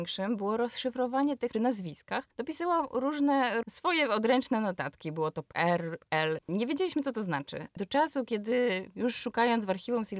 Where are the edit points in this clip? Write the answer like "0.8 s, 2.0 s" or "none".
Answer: 1.5 s, 2.3 s, 5.5 s